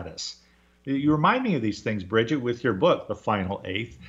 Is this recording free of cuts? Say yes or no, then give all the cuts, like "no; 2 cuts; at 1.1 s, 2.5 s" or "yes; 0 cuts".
yes; 0 cuts